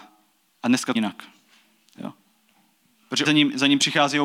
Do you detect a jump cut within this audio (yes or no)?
yes